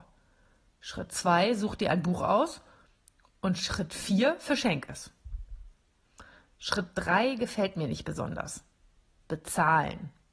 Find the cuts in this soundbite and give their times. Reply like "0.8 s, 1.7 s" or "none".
none